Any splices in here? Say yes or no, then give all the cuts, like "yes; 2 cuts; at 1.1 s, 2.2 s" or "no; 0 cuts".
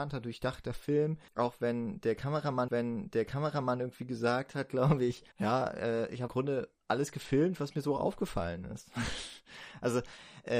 yes; 4 cuts; at 1.3 s, 2.7 s, 5.3 s, 6.3 s